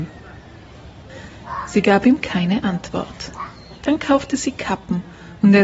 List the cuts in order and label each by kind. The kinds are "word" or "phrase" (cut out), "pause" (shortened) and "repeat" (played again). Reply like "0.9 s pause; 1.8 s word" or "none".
3.8 s pause